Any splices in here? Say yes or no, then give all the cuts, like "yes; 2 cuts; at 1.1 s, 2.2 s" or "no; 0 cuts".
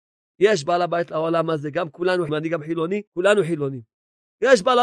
yes; 2 cuts; at 2.3 s, 3.1 s